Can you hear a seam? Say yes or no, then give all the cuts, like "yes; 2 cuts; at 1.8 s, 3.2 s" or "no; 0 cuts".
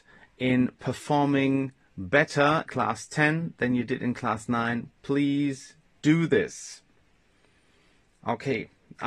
yes; 1 cut; at 2.7 s